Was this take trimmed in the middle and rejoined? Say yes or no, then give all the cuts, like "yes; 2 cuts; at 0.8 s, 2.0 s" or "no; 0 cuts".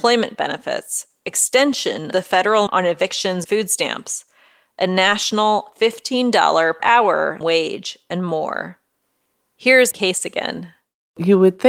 yes; 6 cuts; at 2.1 s, 2.7 s, 3.4 s, 6.8 s, 7.4 s, 9.9 s